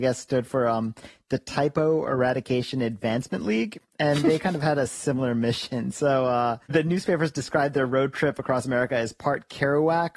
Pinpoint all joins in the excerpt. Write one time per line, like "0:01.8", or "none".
0:06.6

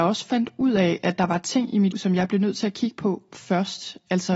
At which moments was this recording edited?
0:01.9

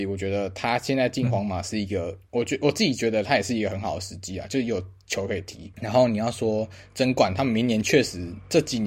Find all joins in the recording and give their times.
0:02.3

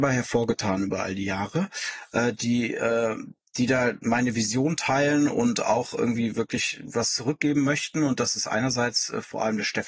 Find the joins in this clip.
none

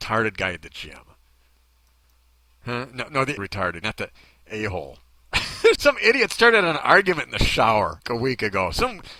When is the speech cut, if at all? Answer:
0:03.4
0:03.8
0:05.7
0:08.0

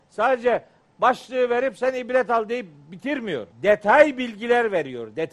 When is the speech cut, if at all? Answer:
0:03.5

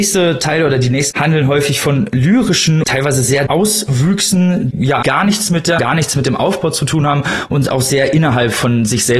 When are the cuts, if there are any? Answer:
0:01.1
0:02.8
0:03.5
0:04.7
0:05.0
0:05.8

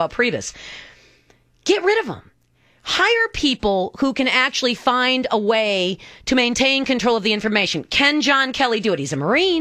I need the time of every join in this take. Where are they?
none

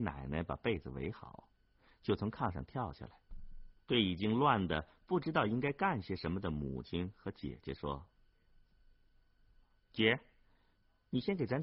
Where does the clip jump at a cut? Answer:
0:03.8

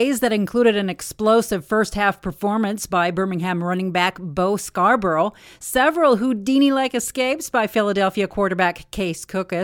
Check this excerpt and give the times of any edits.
none

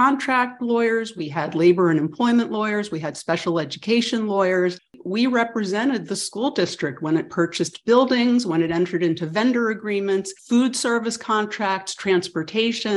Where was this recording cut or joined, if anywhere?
0:10.4

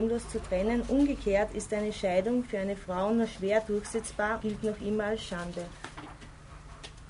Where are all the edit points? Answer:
0:04.4

